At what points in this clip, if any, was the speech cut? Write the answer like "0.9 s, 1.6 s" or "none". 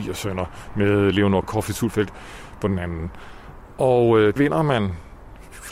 1.4 s, 4.4 s